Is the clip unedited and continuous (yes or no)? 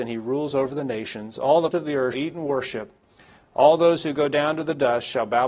no